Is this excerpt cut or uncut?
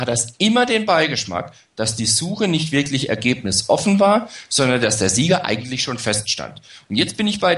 uncut